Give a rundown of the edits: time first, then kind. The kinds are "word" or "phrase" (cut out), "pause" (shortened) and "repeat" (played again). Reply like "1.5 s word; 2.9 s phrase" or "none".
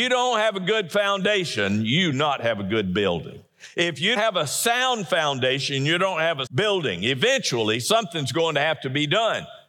2.1 s word; 4.2 s word; 6.5 s word